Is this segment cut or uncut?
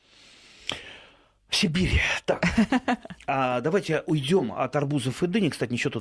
uncut